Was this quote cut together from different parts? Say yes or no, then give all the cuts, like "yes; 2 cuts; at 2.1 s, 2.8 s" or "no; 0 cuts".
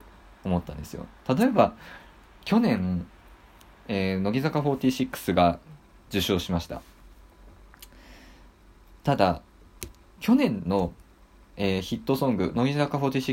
no; 0 cuts